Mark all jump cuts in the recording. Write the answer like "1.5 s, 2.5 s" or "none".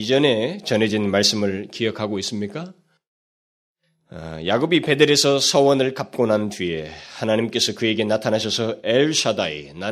none